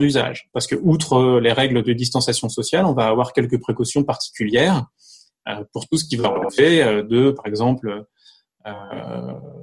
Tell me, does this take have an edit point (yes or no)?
no